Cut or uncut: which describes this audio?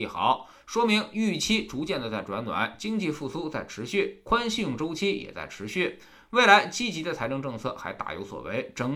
uncut